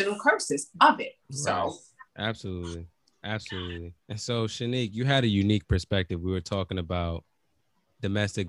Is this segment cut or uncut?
cut